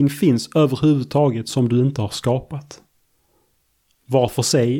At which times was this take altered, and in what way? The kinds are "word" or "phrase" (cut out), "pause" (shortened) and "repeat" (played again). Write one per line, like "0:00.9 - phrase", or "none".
none